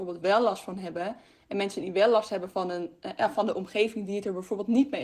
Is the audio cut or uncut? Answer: uncut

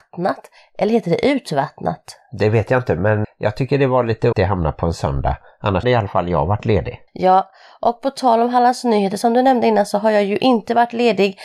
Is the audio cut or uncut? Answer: cut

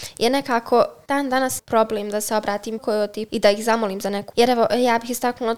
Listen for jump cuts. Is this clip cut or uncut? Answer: cut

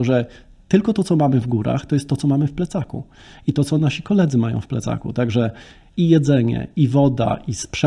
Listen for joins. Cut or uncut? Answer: uncut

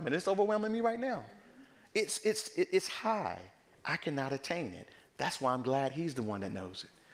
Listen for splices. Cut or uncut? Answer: uncut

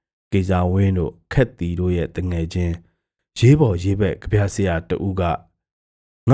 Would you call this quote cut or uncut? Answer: uncut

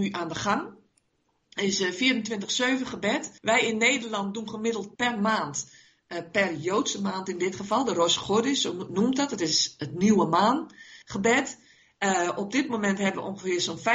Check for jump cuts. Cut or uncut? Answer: cut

